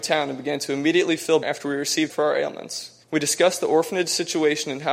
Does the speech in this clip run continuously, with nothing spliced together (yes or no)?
no